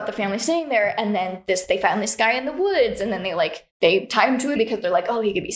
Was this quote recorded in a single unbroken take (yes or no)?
no